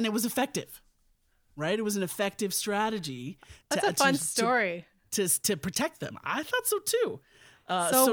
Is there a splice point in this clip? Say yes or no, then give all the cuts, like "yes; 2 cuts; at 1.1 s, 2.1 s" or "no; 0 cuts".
no; 0 cuts